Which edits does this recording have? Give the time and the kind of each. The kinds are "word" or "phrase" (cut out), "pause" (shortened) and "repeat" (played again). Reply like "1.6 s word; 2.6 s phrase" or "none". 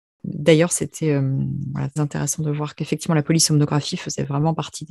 2.0 s word